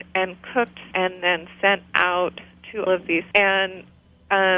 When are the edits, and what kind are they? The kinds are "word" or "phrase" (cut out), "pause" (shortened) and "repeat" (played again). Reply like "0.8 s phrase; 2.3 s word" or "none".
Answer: 0.9 s word; 2.9 s word; 3.3 s word